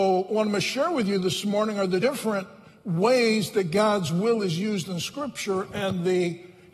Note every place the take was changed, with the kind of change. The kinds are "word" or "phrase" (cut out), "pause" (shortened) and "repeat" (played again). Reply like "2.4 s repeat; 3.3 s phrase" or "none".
2.0 s word

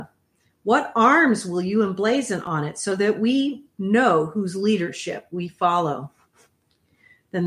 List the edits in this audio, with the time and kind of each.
none

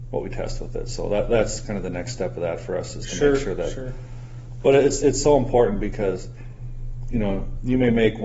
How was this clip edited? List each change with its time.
none

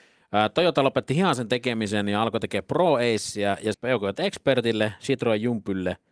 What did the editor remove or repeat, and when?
3.7 s phrase

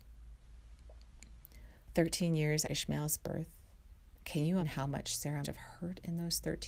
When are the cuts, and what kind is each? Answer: 2.6 s word; 4.6 s word; 5.4 s word

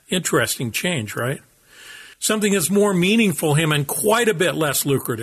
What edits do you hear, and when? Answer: 2.1 s pause

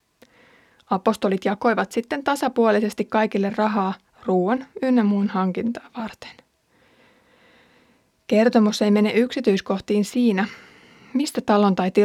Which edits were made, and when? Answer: none

